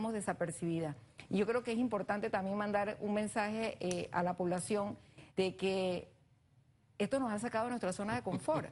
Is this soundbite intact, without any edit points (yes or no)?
no